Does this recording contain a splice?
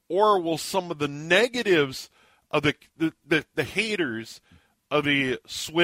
no; 0 cuts

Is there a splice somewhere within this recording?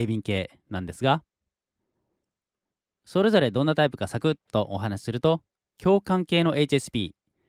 no; 0 cuts

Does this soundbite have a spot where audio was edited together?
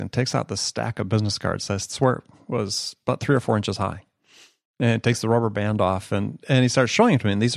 no; 0 cuts

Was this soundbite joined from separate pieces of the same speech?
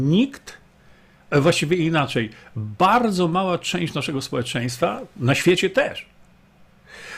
no; 0 cuts

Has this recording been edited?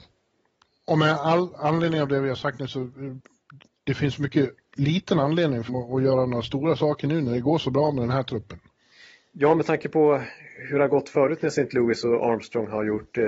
yes; 1 cut; at 5.7 s

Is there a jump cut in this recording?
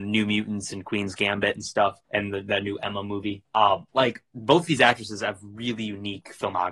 yes; 3 cuts; at 2.0 s, 3.4 s, 3.9 s

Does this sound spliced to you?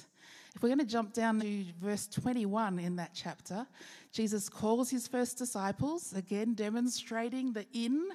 yes; 1 cut; at 1.4 s

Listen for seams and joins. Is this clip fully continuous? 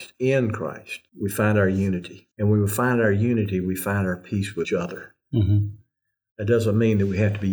no; 3 cuts; at 1.1 s, 2.3 s, 4.6 s

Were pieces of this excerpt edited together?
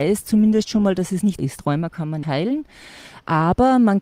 yes; 2 cuts; at 1.4 s, 2.2 s

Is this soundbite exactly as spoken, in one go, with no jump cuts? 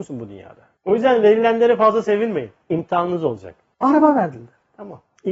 yes; 0 cuts

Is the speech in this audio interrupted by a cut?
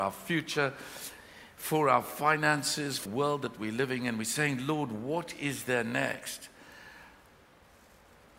yes; 1 cut; at 3.1 s

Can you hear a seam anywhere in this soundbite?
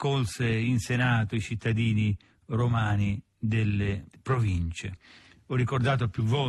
no; 0 cuts

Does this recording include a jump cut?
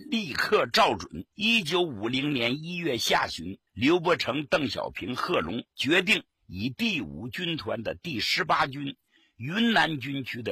yes; 3 cuts; at 1.3 s, 3.7 s, 5.7 s

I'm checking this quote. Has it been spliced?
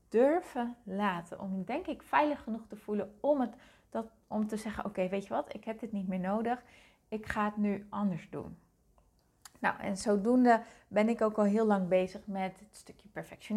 no; 0 cuts

